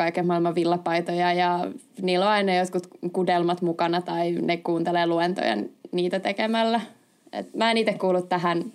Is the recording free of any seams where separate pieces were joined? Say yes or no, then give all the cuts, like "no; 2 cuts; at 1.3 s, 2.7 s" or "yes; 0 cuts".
yes; 0 cuts